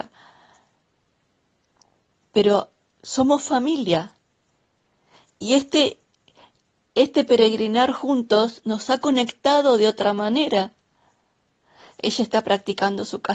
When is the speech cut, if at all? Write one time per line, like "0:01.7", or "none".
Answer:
none